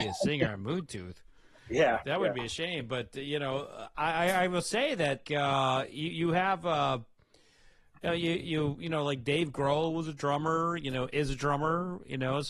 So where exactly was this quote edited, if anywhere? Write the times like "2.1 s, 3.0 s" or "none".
5.3 s